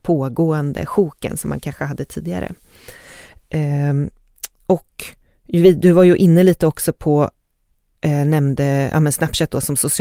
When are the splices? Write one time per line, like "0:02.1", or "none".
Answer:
none